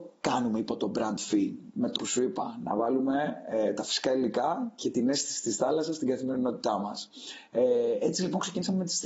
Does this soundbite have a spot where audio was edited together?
yes; 1 cut; at 1.9 s

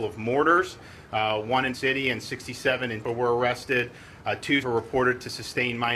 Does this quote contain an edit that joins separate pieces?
yes; 3 cuts; at 1.7 s, 3.0 s, 4.6 s

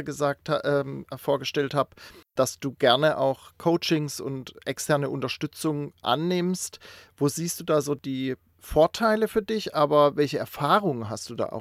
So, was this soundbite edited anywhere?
no; 0 cuts

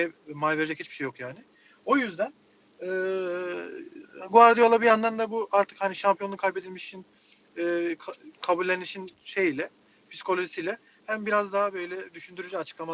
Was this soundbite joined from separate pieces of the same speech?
no; 0 cuts

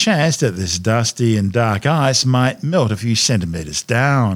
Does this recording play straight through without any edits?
yes; 0 cuts

